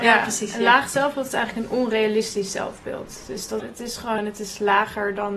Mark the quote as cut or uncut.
cut